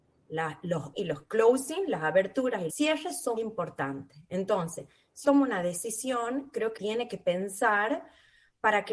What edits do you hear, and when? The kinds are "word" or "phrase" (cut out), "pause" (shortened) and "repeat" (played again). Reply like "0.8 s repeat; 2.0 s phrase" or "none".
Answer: 0.9 s word; 2.7 s word; 3.4 s word; 5.2 s word; 6.8 s word